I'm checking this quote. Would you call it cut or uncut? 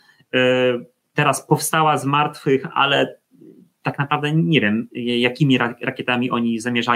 uncut